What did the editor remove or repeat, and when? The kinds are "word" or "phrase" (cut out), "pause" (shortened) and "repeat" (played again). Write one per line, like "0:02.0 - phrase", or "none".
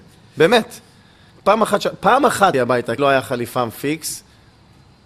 0:02.5 - word
0:03.0 - word